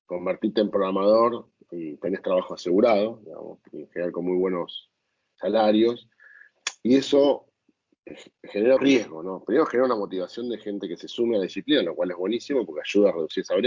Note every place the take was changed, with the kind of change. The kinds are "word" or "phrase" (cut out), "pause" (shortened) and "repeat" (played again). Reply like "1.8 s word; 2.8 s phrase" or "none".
8.8 s word